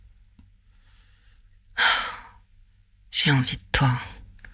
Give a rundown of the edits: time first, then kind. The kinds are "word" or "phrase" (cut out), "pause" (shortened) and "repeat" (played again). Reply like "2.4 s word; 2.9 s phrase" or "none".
none